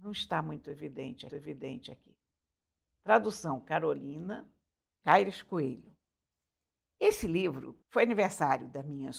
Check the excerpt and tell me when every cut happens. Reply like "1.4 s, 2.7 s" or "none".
1.3 s, 5.0 s, 7.8 s